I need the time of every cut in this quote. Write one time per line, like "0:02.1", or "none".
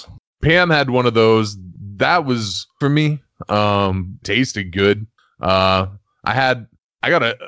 0:02.8
0:04.2